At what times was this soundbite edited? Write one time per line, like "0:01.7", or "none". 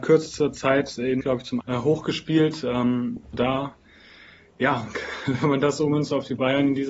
0:01.2
0:01.6
0:03.3